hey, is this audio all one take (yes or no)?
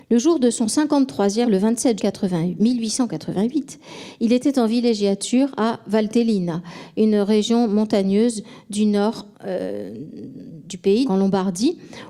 no